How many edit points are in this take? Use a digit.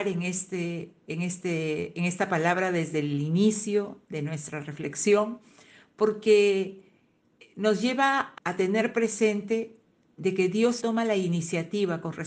2